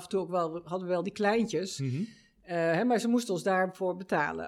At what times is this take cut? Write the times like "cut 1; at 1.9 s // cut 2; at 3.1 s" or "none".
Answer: none